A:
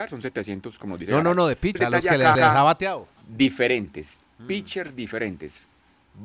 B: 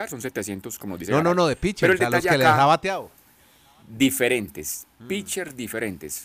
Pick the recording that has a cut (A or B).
A